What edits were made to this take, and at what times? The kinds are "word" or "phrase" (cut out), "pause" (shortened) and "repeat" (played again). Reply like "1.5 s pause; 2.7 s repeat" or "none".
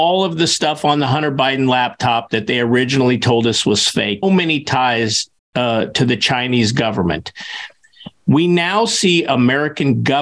4.2 s word